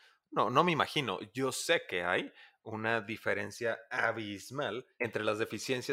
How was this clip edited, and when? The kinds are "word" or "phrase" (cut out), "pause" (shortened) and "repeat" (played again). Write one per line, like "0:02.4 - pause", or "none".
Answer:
none